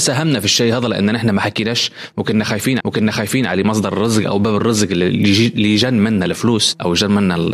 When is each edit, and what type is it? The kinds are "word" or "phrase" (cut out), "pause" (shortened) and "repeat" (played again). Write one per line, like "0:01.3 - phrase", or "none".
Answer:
0:02.8 - repeat